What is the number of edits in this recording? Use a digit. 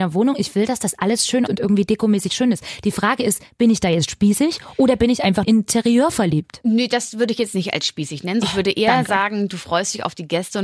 3